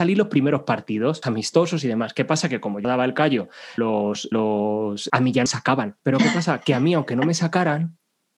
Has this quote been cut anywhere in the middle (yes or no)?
yes